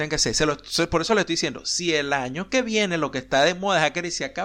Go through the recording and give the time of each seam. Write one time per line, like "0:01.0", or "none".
none